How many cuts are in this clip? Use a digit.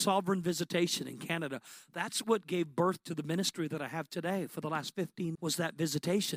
1